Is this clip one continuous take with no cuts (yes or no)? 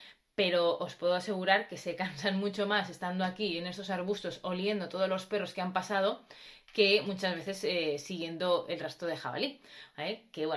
yes